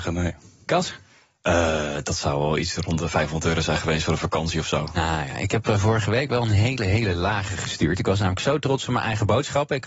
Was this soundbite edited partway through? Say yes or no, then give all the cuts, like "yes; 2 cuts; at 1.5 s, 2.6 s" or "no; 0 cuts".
no; 0 cuts